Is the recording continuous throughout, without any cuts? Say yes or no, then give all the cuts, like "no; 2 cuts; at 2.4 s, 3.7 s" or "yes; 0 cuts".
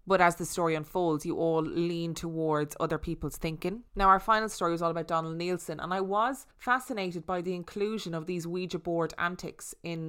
no; 2 cuts; at 3.9 s, 6.5 s